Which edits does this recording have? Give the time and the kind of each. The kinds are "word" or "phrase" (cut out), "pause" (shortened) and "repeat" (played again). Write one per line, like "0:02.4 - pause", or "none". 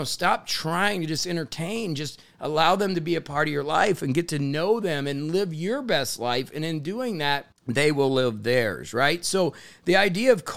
0:07.5 - pause